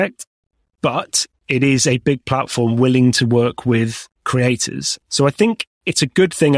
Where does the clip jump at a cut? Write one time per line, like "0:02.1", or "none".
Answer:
0:04.2